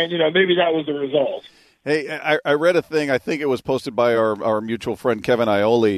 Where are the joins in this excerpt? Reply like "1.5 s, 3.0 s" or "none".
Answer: none